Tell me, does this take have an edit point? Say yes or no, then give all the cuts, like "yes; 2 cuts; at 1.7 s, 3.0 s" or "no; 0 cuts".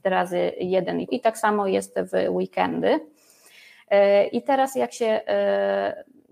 yes; 1 cut; at 1.1 s